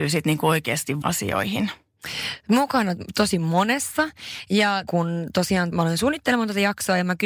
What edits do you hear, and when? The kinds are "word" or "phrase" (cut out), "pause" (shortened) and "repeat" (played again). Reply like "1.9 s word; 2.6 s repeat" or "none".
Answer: 1.0 s word; 4.9 s word; 5.7 s phrase